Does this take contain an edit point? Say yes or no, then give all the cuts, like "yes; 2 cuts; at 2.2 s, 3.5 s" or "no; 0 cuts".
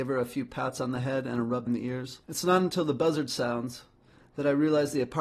yes; 2 cuts; at 1.7 s, 2.2 s